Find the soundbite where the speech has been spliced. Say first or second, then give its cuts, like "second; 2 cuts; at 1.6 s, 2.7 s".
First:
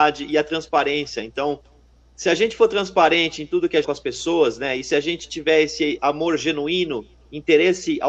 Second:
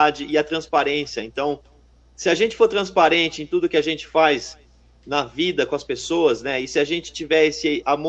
first; 1 cut; at 3.8 s